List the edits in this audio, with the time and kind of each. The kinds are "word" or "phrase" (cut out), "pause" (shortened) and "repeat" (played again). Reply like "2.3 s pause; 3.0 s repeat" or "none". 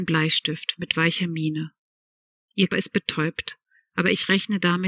2.7 s word